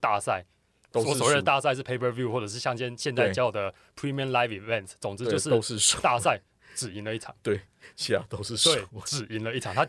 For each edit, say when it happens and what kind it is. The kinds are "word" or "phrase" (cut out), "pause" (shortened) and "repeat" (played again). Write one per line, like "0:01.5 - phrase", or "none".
none